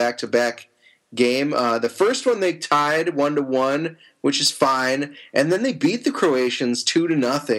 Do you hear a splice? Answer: no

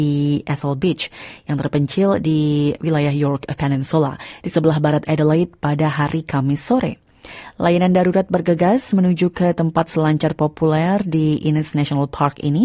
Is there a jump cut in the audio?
no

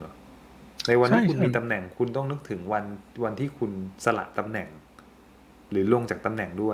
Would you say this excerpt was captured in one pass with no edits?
yes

